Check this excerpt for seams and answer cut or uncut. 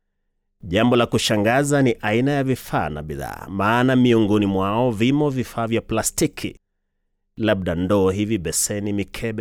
uncut